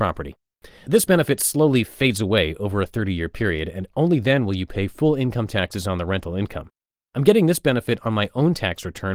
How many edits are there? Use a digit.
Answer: 0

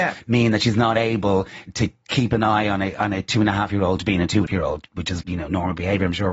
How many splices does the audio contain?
3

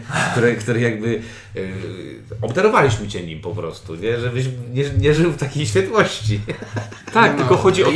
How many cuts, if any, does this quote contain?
0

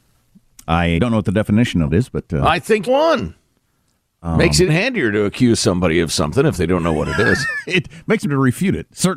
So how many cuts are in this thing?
5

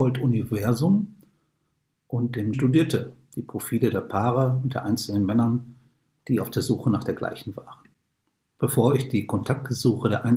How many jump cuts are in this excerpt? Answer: 1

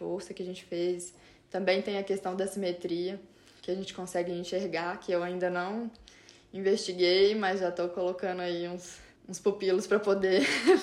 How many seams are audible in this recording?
0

